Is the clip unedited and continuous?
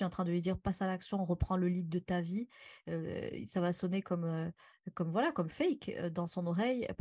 yes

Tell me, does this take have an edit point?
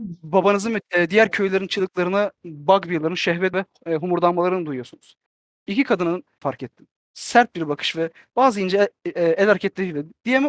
yes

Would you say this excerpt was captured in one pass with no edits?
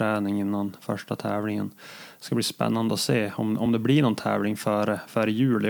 yes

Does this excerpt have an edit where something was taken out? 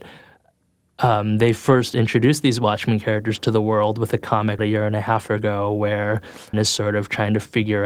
yes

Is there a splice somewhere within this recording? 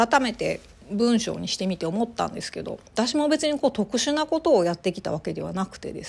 yes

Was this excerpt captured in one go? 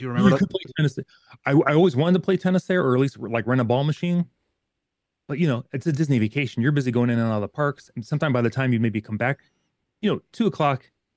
yes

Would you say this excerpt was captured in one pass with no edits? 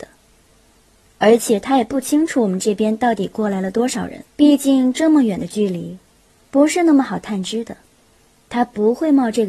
no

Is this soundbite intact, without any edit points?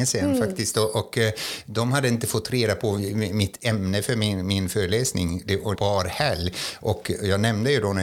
no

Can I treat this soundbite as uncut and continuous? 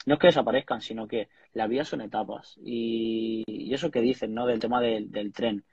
yes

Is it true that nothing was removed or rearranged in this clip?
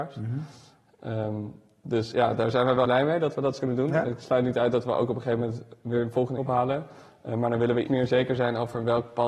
no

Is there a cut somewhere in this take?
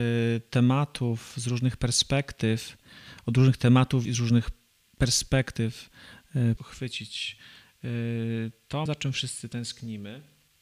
yes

